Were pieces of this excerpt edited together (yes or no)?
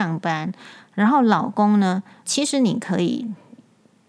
yes